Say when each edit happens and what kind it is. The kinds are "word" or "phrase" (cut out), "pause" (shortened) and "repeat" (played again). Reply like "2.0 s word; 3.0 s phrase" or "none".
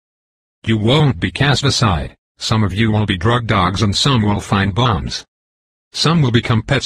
2.2 s pause

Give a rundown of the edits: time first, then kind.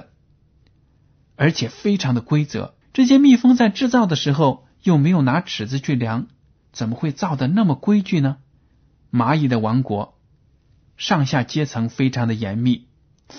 2.8 s pause; 8.5 s pause

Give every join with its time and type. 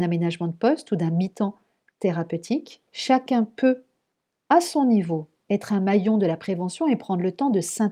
2.9 s pause

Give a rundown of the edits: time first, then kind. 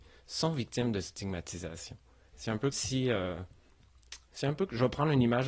2.7 s word

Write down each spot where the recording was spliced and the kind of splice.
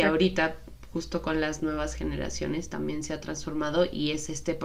none

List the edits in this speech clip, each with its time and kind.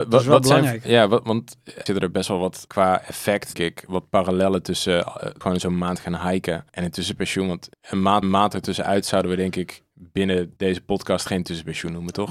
1.9 s word; 2.7 s word; 3.5 s word; 5.4 s word; 6.7 s pause; 7.7 s pause; 8.2 s repeat; 10.6 s pause

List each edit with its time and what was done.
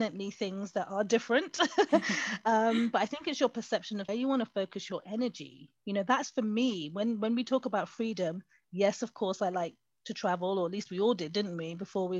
4.1 s phrase

